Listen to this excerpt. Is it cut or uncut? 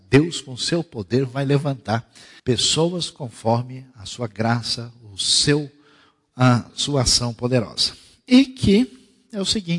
cut